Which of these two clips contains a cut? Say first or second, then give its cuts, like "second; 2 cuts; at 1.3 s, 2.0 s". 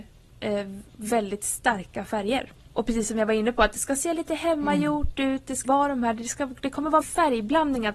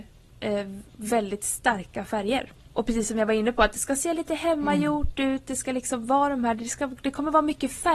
first; 2 cuts; at 5.6 s, 7.0 s